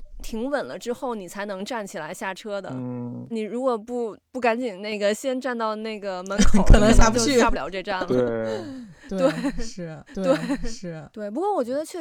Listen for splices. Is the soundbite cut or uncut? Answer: cut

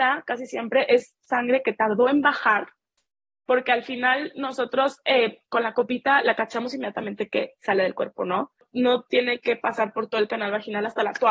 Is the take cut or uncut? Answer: uncut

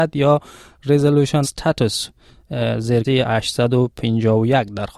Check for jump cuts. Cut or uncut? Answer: cut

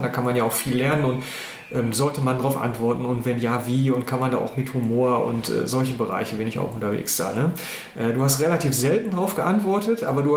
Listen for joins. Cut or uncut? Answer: uncut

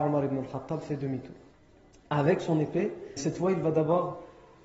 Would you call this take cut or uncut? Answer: cut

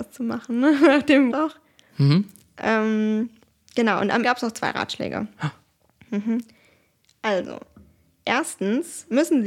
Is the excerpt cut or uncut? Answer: cut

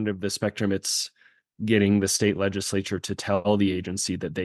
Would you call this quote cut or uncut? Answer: uncut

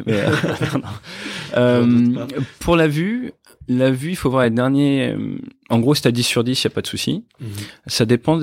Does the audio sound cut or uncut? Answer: uncut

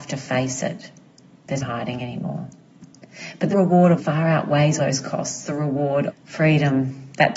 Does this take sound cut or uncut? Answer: cut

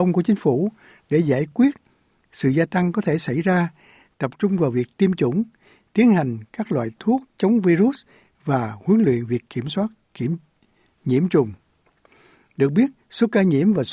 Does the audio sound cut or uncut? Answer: uncut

